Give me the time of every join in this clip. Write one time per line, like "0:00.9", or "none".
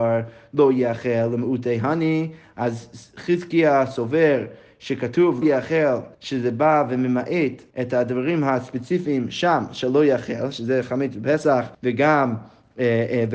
0:05.4
0:06.1
0:07.7
0:11.7